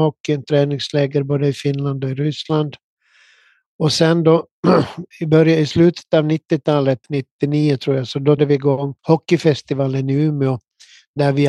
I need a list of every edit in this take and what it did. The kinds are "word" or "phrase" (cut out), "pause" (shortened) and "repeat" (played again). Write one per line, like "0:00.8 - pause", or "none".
0:05.1 - word
0:07.0 - pause
0:08.4 - word
0:09.0 - pause